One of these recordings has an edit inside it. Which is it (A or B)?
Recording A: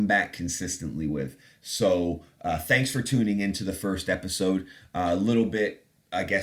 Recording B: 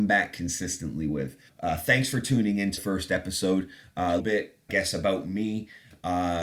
B